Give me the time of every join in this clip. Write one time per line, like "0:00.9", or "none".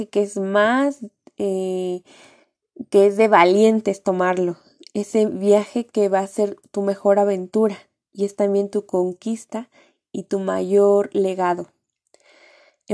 none